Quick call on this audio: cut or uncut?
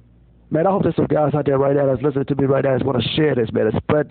uncut